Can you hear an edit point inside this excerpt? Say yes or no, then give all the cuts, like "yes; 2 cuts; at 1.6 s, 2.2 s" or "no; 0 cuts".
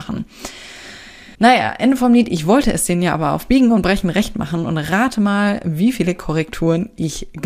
yes; 1 cut; at 1.3 s